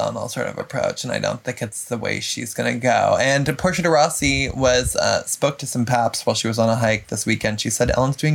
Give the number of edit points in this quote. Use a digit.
0